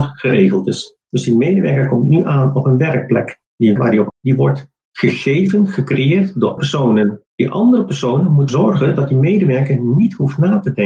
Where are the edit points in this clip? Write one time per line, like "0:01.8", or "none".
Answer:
0:03.8
0:04.1
0:06.6
0:07.3
0:08.5